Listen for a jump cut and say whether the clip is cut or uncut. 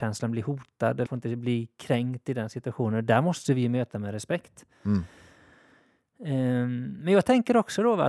cut